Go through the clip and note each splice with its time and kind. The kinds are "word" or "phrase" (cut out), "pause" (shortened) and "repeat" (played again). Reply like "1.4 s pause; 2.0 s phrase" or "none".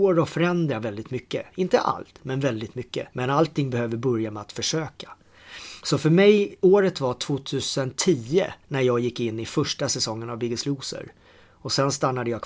3.1 s pause; 8.6 s pause